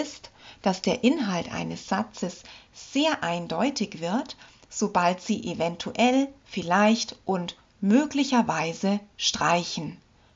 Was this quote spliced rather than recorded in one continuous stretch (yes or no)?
no